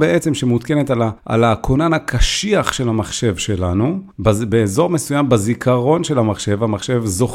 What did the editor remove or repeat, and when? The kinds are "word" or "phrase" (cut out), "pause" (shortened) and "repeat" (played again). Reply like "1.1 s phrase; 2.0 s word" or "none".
1.2 s pause; 4.1 s pause